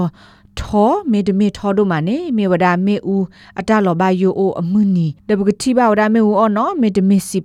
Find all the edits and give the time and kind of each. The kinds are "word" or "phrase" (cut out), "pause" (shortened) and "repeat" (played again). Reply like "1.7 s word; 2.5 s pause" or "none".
none